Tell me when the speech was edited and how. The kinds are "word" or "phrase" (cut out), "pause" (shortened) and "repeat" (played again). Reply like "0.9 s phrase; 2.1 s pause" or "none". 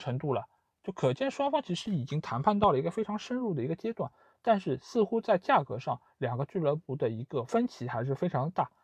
none